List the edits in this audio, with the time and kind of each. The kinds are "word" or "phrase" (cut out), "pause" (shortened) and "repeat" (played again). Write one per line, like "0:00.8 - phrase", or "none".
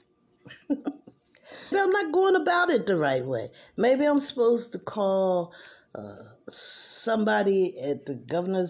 0:01.7 - word
0:06.4 - pause